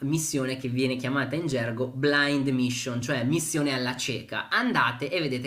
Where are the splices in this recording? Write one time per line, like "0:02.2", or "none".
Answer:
none